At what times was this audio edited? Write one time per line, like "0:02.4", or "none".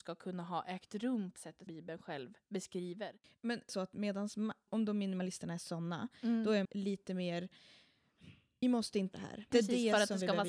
0:01.4
0:01.7
0:03.7
0:04.7
0:06.6
0:08.6
0:09.1
0:09.5